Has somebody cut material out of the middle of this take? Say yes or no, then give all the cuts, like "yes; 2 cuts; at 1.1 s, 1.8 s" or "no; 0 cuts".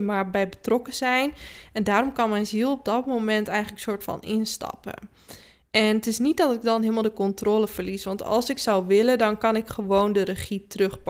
no; 0 cuts